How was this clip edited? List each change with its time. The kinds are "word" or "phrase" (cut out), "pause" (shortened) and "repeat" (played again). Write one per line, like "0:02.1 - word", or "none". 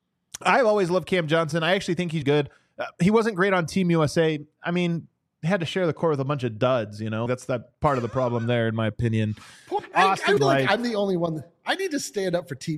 0:02.2 - word
0:07.3 - word
0:09.8 - word
0:10.4 - word